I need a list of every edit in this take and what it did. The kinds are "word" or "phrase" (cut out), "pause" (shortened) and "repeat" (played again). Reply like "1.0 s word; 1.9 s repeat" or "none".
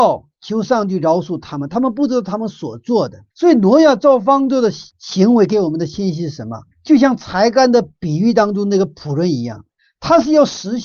3.3 s pause; 4.9 s pause; 6.7 s pause; 9.8 s pause